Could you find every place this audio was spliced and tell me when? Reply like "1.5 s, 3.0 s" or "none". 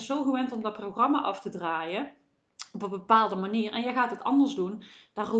none